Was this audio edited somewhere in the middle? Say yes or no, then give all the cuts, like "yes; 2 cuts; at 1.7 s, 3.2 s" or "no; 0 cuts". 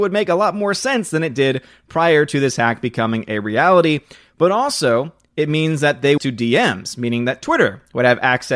yes; 1 cut; at 6.2 s